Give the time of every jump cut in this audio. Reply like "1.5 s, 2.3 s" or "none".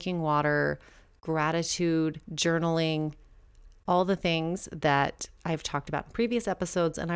2.2 s